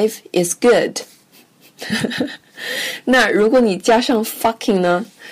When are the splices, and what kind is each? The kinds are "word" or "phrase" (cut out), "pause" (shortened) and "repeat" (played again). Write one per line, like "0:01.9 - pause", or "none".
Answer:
none